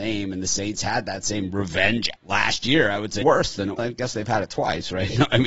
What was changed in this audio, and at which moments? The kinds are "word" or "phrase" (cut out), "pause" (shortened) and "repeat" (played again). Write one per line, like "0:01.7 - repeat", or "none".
0:02.2 - word
0:03.2 - word
0:03.8 - word

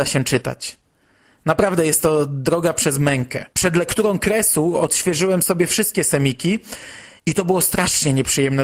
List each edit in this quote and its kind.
0:03.5 - pause
0:07.2 - pause

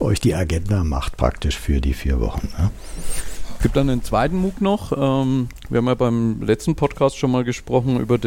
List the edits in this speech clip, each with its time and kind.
none

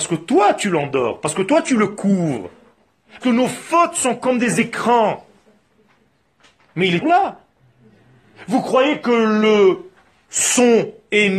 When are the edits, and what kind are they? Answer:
0:03.2 - word
0:07.0 - word

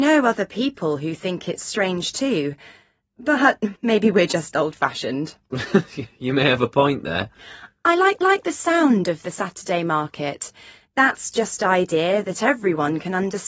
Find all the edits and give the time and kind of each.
0:03.8 - pause
0:08.2 - repeat
0:11.6 - phrase

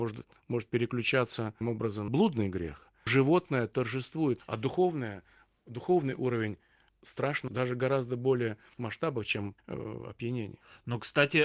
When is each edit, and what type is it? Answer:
0:01.6 - word
0:02.1 - word
0:03.1 - word
0:04.4 - word
0:07.5 - word
0:08.7 - word
0:09.6 - word

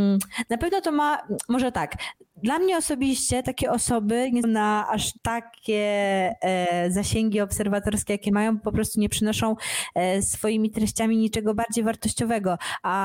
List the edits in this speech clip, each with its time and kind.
0:03.4 - word
0:04.4 - word
0:05.2 - pause

